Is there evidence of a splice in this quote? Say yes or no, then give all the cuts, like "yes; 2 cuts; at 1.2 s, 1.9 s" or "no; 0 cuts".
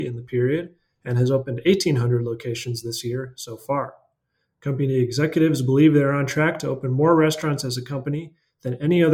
no; 0 cuts